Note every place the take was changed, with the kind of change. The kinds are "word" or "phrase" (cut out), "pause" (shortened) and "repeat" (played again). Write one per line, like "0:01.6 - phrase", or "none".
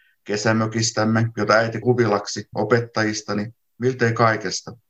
0:01.8 - word
0:02.5 - word

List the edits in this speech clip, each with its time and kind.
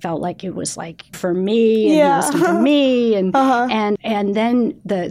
0:01.1 - word
0:02.3 - word
0:04.0 - word

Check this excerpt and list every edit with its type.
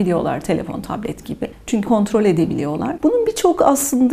0:01.8 - word

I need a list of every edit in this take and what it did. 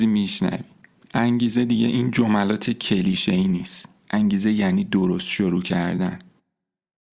none

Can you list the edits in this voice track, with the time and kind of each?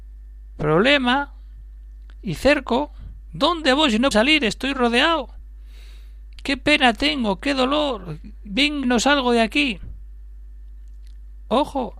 0:04.1 - word
0:08.8 - phrase

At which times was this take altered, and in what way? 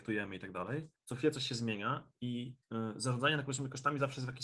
0:01.0 - pause
0:02.6 - pause

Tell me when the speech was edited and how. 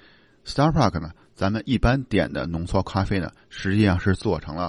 none

